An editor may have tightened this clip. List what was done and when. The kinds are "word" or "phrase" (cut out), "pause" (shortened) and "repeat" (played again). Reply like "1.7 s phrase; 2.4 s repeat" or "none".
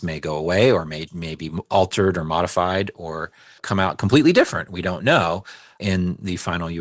none

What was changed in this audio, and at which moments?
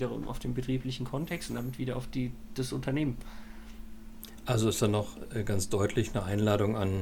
none

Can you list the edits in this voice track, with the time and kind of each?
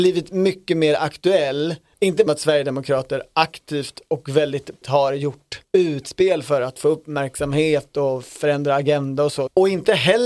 2.3 s phrase; 4.8 s word; 5.6 s pause

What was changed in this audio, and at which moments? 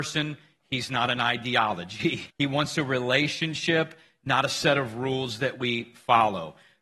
2.3 s pause

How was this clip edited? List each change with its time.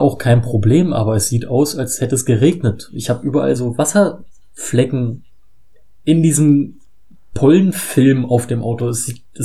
none

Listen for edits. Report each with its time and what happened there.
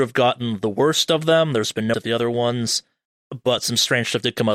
1.9 s phrase

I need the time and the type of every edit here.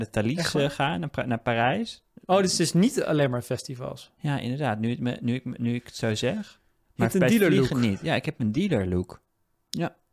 none

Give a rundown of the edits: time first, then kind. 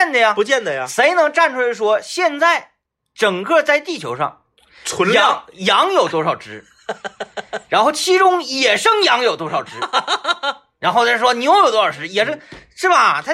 3.0 s pause

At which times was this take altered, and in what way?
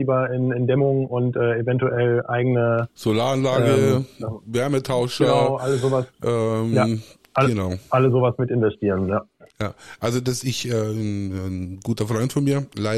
none

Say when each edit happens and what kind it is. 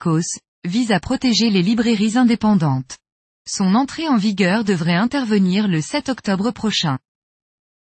3.1 s pause

